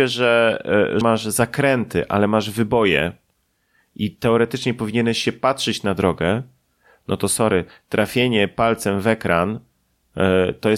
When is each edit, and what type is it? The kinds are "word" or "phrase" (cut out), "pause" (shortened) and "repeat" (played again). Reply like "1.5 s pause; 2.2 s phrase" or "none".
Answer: 1.0 s word

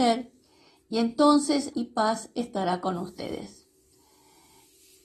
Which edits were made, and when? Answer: 1.7 s phrase

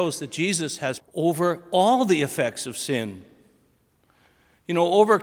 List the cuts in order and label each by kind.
1.0 s word

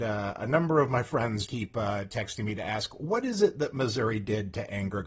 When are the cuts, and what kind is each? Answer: 1.5 s word

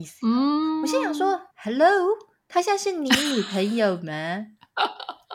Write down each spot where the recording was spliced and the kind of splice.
1.5 s pause

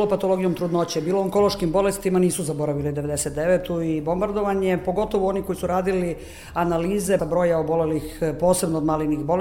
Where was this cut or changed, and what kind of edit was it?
7.2 s word

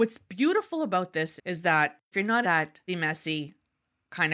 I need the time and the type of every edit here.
1.4 s word; 2.1 s word; 2.4 s word; 2.9 s word

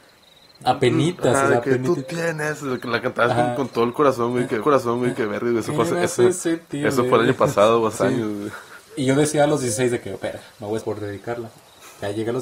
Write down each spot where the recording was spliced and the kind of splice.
4.6 s repeat; 7.9 s word; 10.8 s phrase

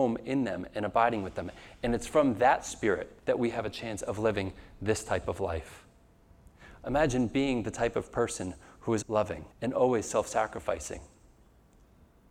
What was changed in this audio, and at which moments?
3.2 s pause; 9.0 s word; 9.5 s pause

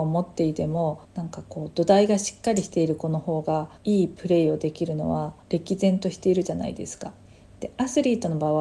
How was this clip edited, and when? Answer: 1.0 s pause; 3.8 s pause; 5.4 s pause

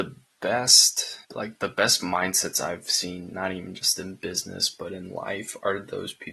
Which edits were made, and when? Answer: 1.2 s pause

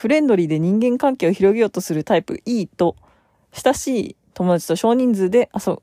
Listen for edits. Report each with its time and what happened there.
none

